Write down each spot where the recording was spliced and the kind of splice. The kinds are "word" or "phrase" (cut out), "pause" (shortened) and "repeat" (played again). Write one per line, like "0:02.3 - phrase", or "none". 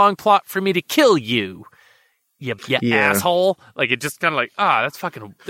0:02.6 - pause